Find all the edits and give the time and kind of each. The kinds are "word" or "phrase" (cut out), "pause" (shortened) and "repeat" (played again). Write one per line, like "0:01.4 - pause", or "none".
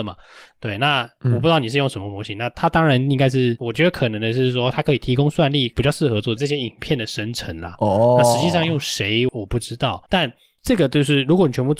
0:10.1 - pause